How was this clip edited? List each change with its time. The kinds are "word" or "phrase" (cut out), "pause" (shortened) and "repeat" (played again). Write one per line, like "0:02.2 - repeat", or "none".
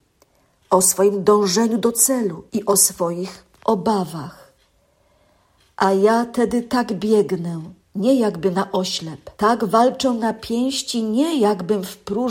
0:02.5 - pause
0:03.5 - pause
0:07.8 - pause
0:09.3 - pause